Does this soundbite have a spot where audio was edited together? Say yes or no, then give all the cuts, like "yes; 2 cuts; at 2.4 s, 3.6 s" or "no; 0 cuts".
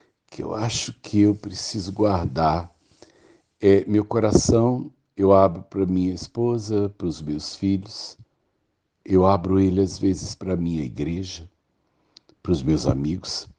no; 0 cuts